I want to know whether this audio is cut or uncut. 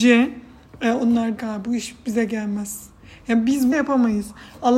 cut